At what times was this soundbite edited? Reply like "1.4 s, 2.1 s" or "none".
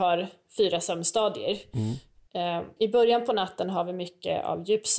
2.8 s